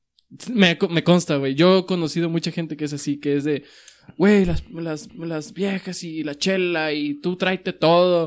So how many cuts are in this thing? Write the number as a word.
one